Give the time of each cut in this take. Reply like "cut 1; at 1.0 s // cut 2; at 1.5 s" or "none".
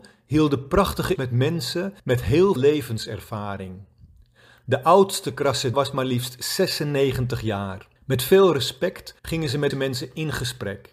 cut 1; at 1.2 s // cut 2; at 2.0 s // cut 3; at 2.6 s // cut 4; at 5.7 s // cut 5; at 8.0 s // cut 6; at 9.2 s // cut 7; at 9.7 s